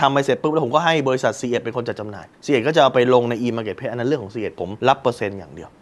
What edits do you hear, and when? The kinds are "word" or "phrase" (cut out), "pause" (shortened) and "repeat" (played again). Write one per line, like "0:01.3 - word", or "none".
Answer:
0:02.3 - pause
0:04.8 - pause

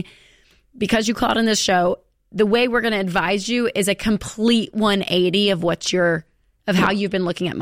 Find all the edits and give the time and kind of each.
none

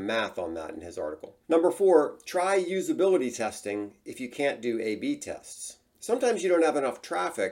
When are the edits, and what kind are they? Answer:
0:01.4 - pause

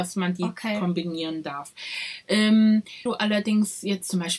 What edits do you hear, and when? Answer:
0:03.1 - word

